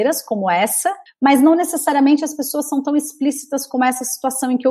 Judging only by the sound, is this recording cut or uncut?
cut